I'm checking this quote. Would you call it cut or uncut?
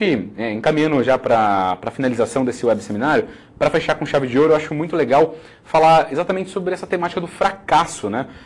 uncut